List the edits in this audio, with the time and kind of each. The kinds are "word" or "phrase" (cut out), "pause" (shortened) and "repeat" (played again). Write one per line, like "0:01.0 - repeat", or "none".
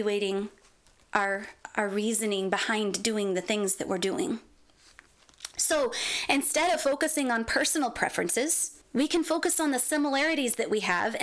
0:08.8 - pause